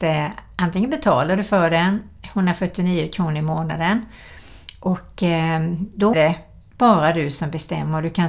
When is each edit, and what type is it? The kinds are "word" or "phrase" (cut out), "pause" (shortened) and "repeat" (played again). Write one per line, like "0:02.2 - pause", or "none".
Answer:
0:06.1 - word